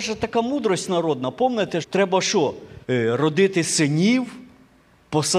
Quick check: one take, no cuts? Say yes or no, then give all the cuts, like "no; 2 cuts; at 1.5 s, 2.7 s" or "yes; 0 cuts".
no; 2 cuts; at 1.8 s, 2.8 s